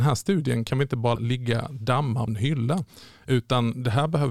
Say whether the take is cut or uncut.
cut